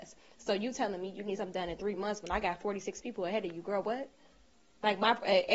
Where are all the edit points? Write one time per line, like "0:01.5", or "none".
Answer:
none